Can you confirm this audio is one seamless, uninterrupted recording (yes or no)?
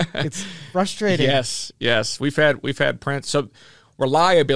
yes